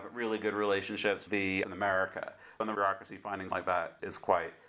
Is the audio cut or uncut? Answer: cut